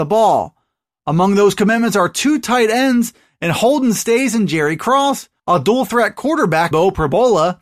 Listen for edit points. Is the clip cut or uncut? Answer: cut